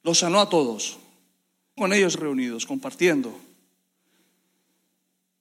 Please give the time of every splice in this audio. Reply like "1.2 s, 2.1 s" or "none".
1.8 s, 2.1 s